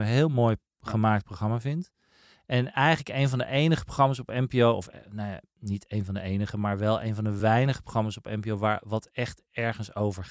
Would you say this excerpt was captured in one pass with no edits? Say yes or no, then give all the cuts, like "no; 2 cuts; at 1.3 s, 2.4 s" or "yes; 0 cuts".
yes; 0 cuts